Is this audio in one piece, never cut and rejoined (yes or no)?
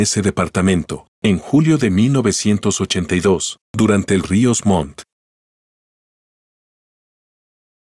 no